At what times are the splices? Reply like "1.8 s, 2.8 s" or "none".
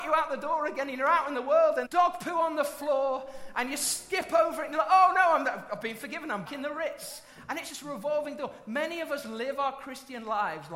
1.8 s, 6.5 s, 7.7 s

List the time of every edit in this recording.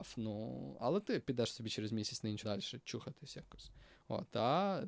2.4 s

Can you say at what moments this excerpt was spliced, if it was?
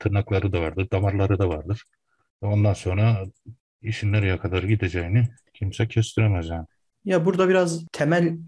none

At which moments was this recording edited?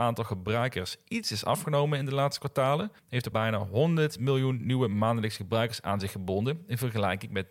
3.0 s, 3.3 s

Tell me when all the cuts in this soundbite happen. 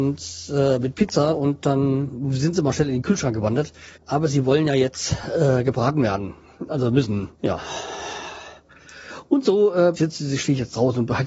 4.0 s, 7.3 s, 10.0 s

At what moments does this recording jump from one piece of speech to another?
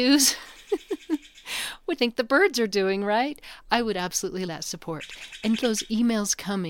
2.0 s, 4.5 s, 5.6 s

